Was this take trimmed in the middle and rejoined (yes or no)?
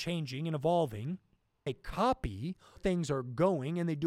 yes